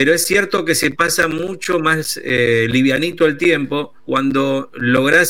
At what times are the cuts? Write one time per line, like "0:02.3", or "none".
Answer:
0:04.0